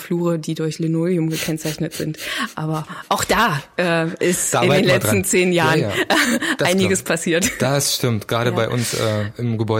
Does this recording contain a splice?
no; 0 cuts

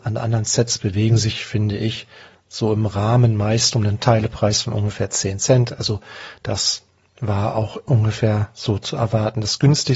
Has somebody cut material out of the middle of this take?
no; 0 cuts

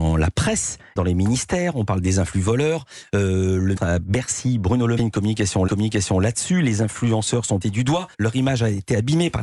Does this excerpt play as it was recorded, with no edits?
no; 6 cuts; at 1.0 s, 3.8 s, 5.0 s, 5.7 s, 7.6 s, 8.1 s

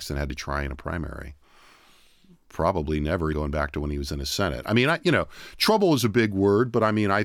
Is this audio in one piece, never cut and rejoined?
no; 1 cut; at 3.3 s

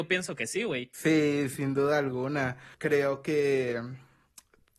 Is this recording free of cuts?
no; 1 cut; at 2.7 s

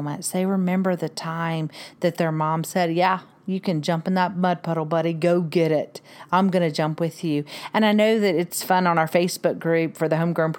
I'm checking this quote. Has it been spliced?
no; 0 cuts

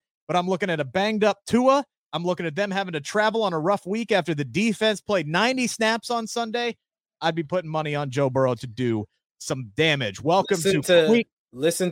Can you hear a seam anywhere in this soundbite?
no; 0 cuts

